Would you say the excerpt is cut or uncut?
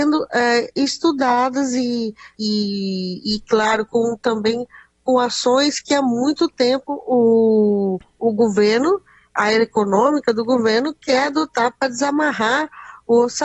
uncut